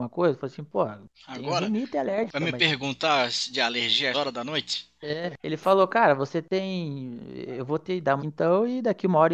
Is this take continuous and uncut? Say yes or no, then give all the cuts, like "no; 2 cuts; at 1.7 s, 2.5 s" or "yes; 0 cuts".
no; 4 cuts; at 1.1 s, 4.1 s, 5.4 s, 8.2 s